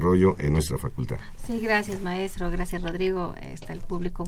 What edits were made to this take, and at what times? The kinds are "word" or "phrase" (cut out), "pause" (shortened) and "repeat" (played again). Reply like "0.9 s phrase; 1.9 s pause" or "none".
none